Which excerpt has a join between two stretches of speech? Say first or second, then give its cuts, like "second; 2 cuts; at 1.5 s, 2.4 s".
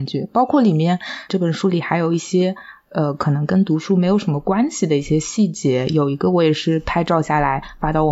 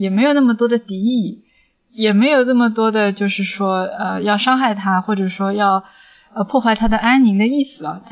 first; 1 cut; at 1.3 s